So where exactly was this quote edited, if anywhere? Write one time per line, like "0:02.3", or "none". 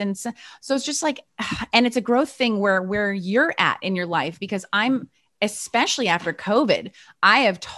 none